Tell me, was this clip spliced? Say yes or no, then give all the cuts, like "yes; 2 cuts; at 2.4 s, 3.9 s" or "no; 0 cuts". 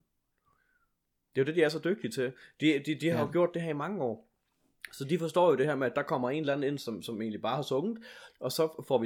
no; 0 cuts